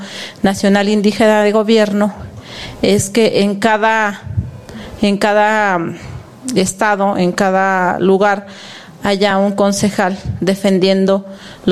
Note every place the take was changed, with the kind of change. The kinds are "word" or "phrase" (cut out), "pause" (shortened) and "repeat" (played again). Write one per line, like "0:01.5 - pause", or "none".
none